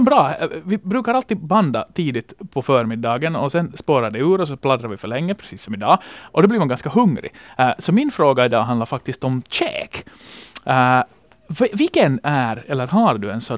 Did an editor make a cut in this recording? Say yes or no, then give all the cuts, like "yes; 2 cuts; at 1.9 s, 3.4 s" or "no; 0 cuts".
no; 0 cuts